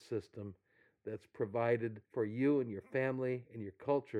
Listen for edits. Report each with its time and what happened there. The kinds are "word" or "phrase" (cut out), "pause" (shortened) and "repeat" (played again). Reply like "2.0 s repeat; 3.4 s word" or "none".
2.0 s pause